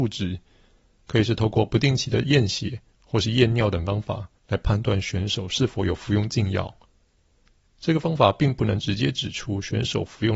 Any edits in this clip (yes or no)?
yes